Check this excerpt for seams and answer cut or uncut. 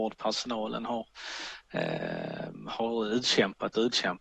uncut